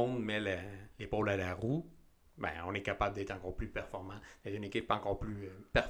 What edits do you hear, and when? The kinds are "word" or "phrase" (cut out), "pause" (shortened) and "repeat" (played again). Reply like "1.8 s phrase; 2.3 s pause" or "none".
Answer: none